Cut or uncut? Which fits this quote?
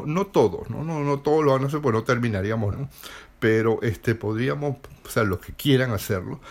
cut